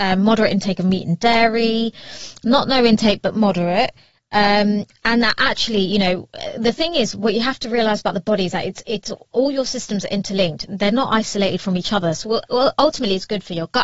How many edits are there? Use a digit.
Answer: 0